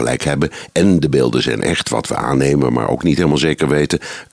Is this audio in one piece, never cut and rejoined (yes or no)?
yes